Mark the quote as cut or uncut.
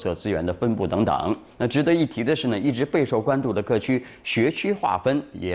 cut